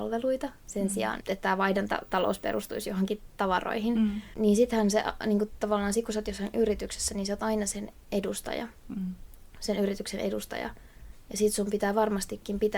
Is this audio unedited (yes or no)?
no